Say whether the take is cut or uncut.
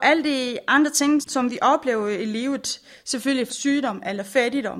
cut